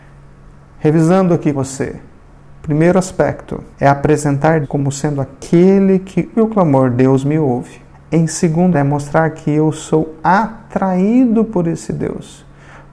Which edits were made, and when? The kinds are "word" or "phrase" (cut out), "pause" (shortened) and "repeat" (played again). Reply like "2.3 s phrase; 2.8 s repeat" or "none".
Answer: 1.5 s word; 3.7 s pause; 4.6 s word; 6.3 s word; 7.9 s pause; 8.7 s word